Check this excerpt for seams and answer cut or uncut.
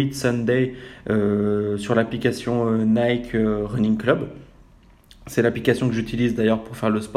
uncut